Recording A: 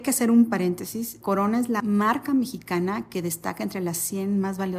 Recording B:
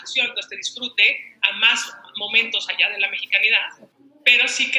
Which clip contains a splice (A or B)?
A